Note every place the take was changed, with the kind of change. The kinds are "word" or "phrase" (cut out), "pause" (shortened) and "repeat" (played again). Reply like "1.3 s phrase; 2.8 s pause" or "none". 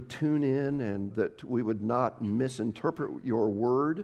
1.1 s word